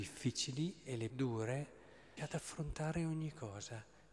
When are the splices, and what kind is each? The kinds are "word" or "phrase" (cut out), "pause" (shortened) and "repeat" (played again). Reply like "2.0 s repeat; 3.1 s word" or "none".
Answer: 1.1 s word; 2.2 s word